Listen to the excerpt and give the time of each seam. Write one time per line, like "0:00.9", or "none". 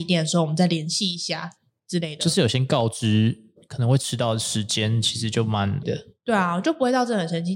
0:05.8